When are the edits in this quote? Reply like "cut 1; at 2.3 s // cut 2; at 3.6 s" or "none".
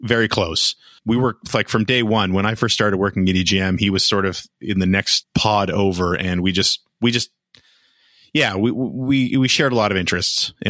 cut 1; at 1.0 s // cut 2; at 5.2 s